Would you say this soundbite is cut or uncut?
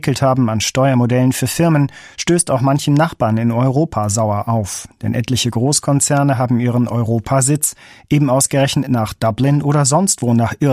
uncut